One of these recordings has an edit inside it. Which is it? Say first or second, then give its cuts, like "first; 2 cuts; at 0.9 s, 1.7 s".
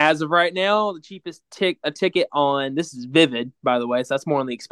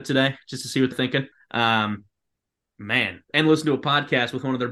second; 3 cuts; at 0.9 s, 1.3 s, 3.2 s